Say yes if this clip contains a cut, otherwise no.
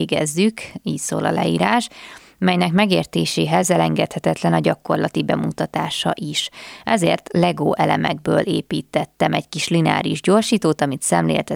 no